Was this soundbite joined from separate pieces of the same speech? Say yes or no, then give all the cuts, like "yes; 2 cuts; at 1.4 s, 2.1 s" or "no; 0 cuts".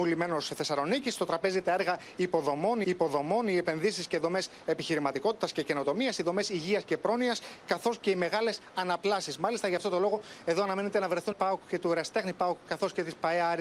yes; 2 cuts; at 2.8 s, 11.3 s